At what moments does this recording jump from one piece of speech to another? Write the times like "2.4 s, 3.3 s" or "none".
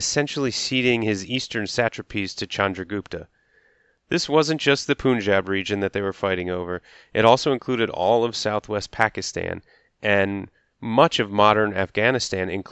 none